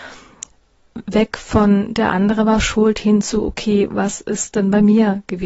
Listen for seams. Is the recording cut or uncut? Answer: uncut